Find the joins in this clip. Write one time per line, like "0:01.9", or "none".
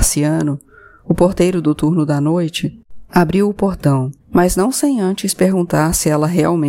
0:04.2